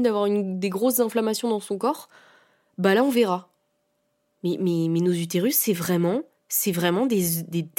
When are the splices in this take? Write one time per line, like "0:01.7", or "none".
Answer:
none